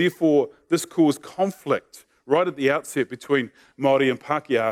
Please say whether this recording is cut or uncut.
uncut